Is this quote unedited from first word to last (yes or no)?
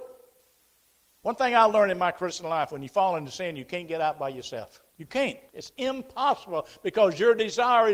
no